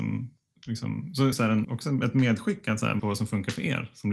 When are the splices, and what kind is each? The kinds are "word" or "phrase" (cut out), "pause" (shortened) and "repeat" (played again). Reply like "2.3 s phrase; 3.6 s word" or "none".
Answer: 1.3 s word; 1.6 s word; 3.0 s word